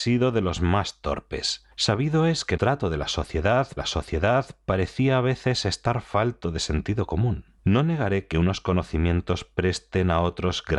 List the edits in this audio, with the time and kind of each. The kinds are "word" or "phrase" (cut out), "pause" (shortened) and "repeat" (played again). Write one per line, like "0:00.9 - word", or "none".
0:01.7 - pause
0:02.6 - word
0:03.8 - repeat
0:07.6 - pause

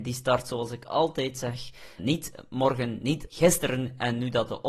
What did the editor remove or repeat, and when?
0:02.0 - word
0:03.3 - phrase

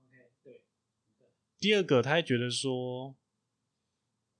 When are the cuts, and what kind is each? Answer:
0:01.1 - pause

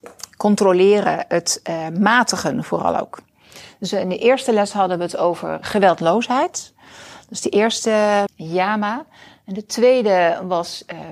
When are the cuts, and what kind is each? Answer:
0:05.6 - word
0:08.3 - word

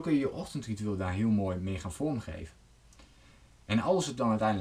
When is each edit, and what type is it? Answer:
none

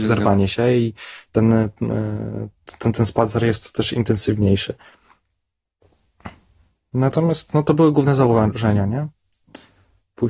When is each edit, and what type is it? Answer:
none

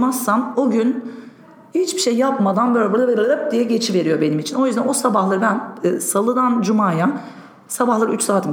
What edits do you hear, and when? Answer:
none

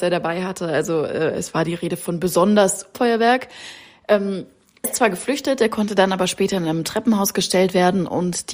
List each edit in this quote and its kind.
0:02.9 - phrase
0:04.8 - word

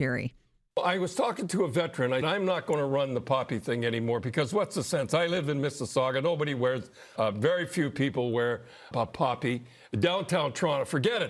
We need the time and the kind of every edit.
0:02.2 - word
0:07.2 - word
0:08.9 - word

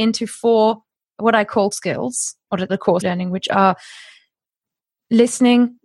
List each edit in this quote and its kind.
0:01.7 - word
0:02.7 - phrase
0:03.0 - phrase

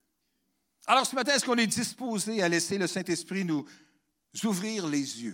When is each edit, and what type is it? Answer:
none

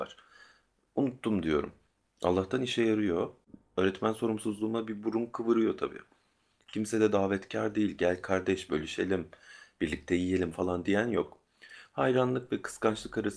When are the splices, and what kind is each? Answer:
none

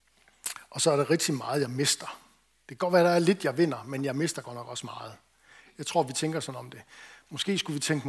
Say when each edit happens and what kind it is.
none

